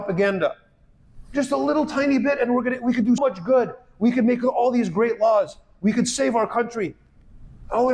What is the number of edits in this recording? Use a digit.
1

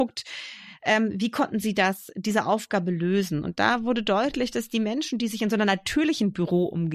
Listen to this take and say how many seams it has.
0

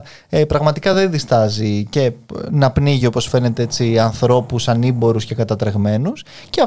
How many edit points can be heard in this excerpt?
0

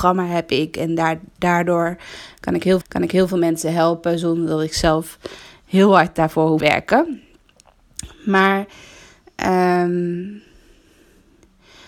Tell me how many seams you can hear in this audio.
2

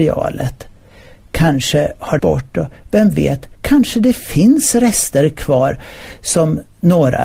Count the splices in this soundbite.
2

